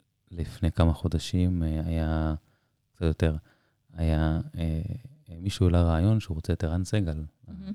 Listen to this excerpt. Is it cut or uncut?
uncut